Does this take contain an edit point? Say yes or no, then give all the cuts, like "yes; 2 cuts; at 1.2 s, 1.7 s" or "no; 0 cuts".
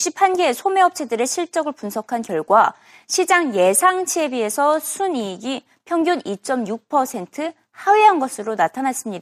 no; 0 cuts